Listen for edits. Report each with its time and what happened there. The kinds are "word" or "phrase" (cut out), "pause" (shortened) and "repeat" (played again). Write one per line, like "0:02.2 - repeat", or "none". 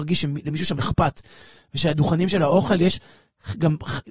none

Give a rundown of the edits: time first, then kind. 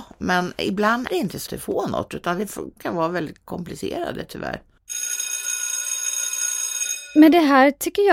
0:01.1 - word
0:01.5 - word
0:02.1 - word
0:02.8 - word

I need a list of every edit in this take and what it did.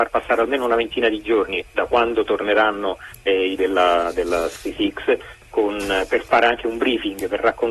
0:03.6 - word

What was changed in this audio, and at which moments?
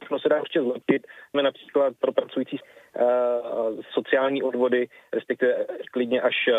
0:01.3 - word
0:02.0 - word
0:02.6 - word
0:03.9 - word

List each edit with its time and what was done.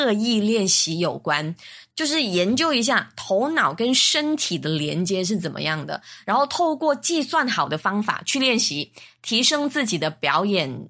none

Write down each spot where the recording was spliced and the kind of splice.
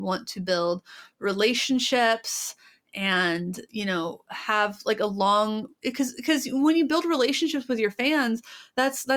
none

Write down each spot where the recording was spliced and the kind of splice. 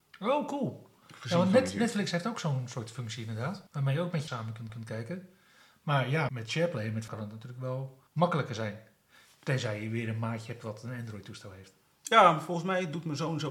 0:03.7 - pause
0:04.3 - word
0:04.7 - repeat
0:06.3 - word
0:07.1 - word
0:08.1 - pause

